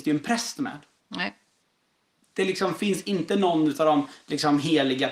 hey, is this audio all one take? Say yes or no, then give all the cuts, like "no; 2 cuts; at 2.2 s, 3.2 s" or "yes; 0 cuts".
yes; 0 cuts